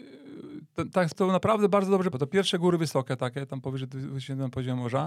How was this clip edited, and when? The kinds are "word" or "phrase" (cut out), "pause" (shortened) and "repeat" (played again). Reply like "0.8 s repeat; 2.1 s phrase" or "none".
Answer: 1.1 s word; 2.1 s word

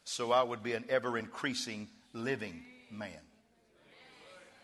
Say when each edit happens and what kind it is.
none

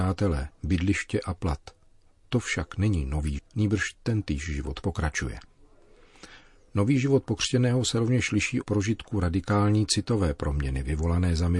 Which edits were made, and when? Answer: 3.4 s word; 4.8 s word; 8.6 s word

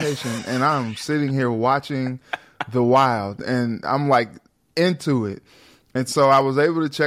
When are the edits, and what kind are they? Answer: none

